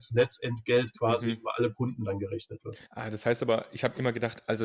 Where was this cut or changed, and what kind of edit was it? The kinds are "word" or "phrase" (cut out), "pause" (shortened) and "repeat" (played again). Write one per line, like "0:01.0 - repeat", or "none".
0:02.9 - pause

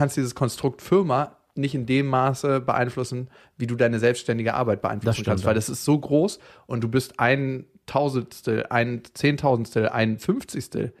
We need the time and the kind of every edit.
none

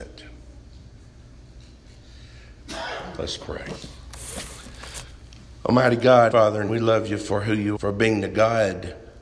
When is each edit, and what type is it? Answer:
0:06.3 - word
0:06.7 - word
0:07.8 - word

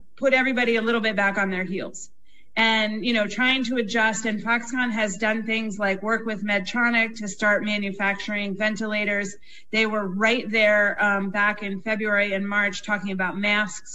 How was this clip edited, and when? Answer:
none

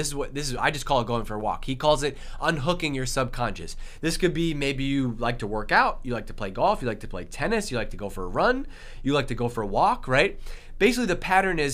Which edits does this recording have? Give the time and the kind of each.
none

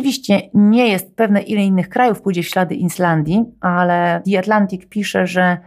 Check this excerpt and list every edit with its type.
none

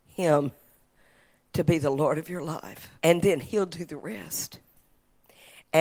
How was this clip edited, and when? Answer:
0:03.0 - pause

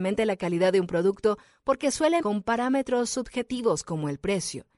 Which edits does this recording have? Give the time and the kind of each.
0:02.2 - word

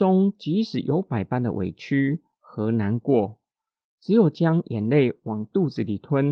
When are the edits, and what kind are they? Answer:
none

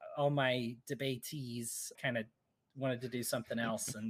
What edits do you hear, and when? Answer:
0:01.9 - word

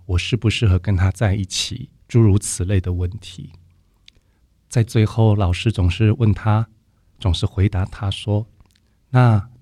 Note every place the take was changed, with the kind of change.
0:02.0 - pause

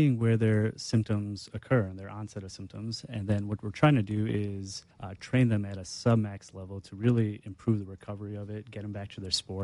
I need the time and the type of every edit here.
0:04.9 - pause

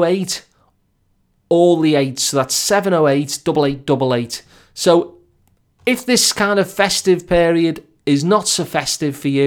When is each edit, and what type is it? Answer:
none

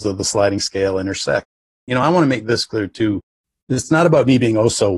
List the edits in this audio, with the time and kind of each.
none

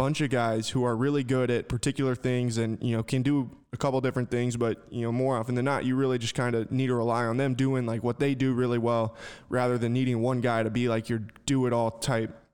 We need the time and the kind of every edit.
none

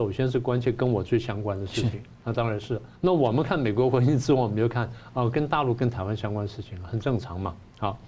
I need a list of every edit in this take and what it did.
0:02.9 - pause

